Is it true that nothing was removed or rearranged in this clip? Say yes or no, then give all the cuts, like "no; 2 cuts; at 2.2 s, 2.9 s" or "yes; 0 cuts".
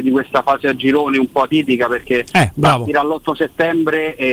yes; 0 cuts